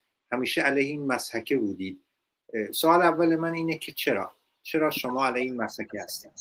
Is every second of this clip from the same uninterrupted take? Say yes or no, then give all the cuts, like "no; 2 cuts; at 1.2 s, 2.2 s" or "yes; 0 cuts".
yes; 0 cuts